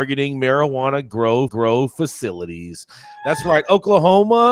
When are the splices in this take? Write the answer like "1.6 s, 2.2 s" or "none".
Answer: 1.5 s

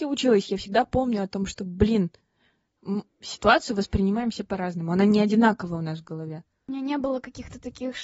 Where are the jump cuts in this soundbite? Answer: 3.1 s

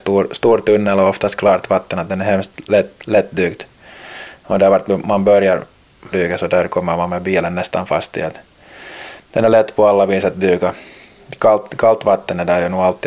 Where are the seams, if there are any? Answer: 6.1 s

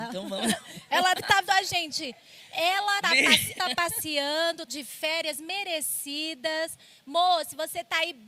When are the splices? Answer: 1.2 s, 1.5 s, 3.0 s, 3.6 s, 4.7 s

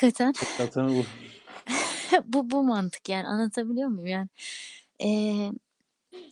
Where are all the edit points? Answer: none

